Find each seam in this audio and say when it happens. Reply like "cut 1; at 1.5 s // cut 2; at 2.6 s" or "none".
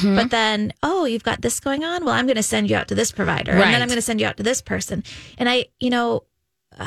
none